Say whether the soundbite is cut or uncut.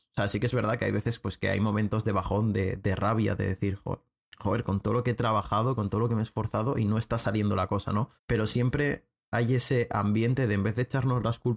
cut